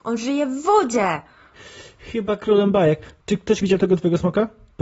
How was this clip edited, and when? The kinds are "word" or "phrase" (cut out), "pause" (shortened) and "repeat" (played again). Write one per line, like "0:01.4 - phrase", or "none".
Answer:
0:03.2 - pause
0:03.6 - word